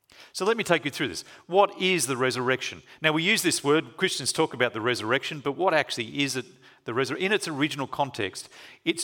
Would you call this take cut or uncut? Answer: uncut